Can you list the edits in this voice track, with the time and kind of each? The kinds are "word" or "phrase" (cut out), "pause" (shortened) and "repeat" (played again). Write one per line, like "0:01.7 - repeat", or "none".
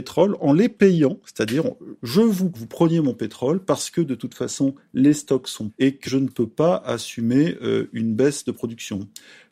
0:02.0 - pause
0:02.5 - phrase
0:05.7 - word
0:06.0 - word